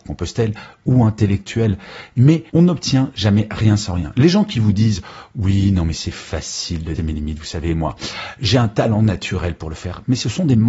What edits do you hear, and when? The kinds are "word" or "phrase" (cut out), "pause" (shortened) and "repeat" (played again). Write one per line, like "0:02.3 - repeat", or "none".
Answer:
0:02.5 - pause
0:07.0 - word